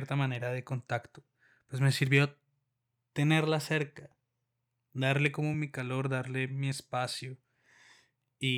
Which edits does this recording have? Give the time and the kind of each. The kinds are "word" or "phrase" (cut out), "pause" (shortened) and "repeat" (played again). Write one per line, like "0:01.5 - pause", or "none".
none